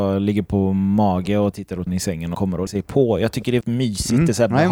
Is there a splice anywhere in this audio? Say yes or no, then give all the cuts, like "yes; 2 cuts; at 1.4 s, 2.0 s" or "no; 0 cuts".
yes; 5 cuts; at 1.5 s, 1.9 s, 2.3 s, 2.7 s, 3.6 s